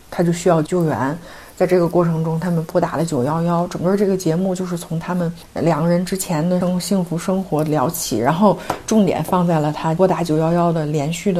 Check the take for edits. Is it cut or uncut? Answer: uncut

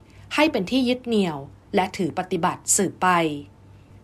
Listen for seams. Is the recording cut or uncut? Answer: uncut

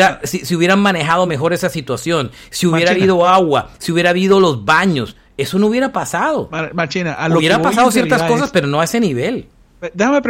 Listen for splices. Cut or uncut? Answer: uncut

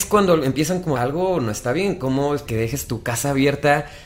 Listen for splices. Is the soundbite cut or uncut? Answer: cut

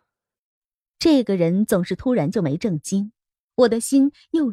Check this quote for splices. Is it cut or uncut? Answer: cut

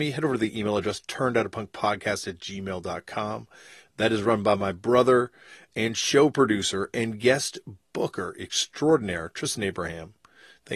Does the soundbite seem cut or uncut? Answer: uncut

